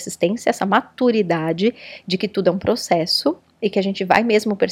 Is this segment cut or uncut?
uncut